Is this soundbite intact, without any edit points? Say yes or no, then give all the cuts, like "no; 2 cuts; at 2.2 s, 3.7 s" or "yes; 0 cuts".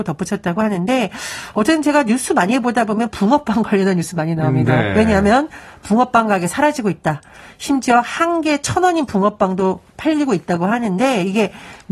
yes; 0 cuts